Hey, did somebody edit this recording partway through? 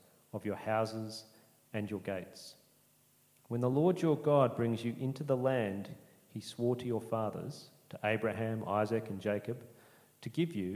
no; 0 cuts

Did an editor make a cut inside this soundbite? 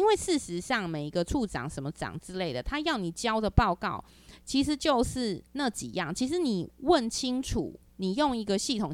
yes; 1 cut; at 5.5 s

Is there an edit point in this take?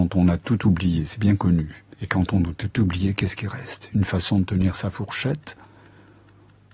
yes; 1 cut; at 1.9 s

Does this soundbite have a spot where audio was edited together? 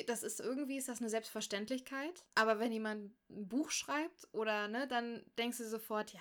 yes; 1 cut; at 2.3 s

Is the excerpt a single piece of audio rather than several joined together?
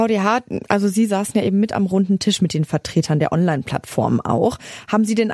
yes; 0 cuts

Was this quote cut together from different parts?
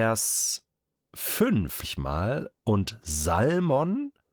yes; 1 cut; at 1.8 s

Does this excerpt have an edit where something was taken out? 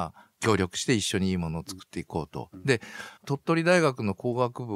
yes; 1 cut; at 3.2 s

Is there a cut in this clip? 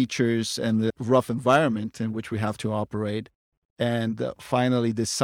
no; 0 cuts

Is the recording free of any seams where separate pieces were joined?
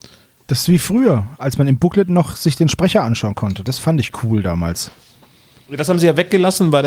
yes; 0 cuts

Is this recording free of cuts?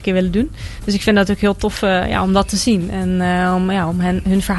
yes; 0 cuts

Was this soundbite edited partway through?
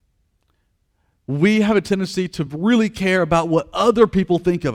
no; 0 cuts

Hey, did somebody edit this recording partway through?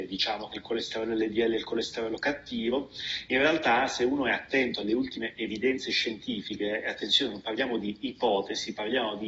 no; 0 cuts

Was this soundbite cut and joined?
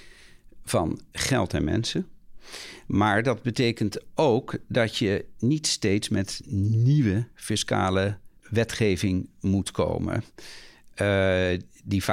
yes; 1 cut; at 8.4 s

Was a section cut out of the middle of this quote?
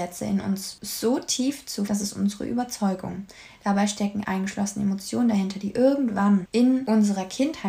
yes; 2 cuts; at 1.9 s, 4.2 s

